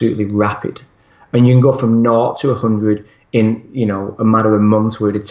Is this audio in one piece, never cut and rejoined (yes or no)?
yes